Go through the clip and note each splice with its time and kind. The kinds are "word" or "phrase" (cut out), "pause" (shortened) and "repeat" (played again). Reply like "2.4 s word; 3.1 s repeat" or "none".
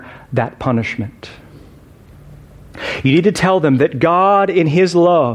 none